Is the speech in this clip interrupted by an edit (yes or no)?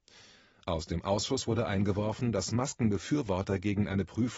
no